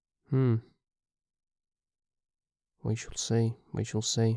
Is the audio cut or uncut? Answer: uncut